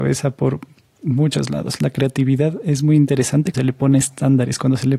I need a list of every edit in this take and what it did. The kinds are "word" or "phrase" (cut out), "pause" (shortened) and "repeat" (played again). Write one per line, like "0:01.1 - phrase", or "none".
0:03.5 - word